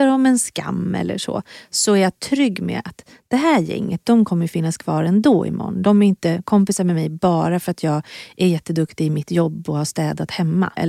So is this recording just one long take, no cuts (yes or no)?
yes